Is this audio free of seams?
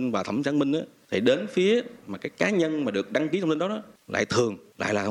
yes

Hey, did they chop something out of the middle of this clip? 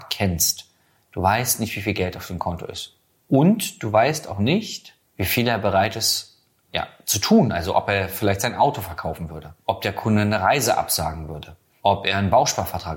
no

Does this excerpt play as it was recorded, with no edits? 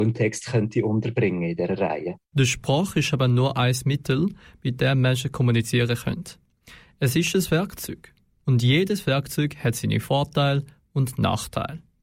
yes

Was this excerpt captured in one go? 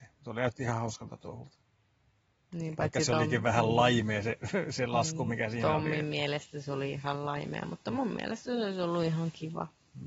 yes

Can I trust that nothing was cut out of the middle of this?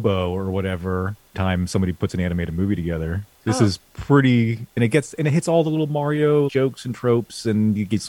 no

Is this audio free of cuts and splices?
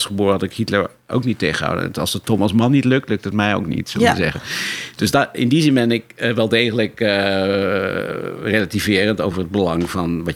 yes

